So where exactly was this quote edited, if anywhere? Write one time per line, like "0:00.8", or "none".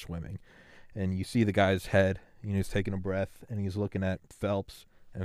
none